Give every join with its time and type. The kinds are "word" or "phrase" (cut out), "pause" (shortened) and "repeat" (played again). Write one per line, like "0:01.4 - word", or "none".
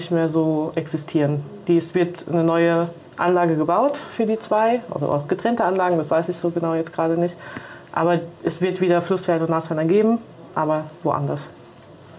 none